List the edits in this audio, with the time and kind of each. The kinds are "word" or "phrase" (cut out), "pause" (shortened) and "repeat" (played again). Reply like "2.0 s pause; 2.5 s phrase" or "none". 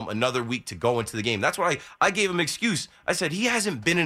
none